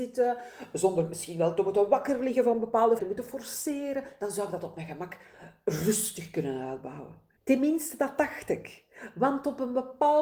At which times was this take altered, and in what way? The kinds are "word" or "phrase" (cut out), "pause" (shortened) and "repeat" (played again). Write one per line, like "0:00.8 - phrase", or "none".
0:03.0 - phrase
0:07.4 - pause